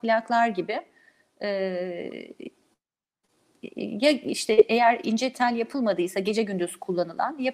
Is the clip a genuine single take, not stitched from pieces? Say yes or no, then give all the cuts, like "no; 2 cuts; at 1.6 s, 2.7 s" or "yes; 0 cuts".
yes; 0 cuts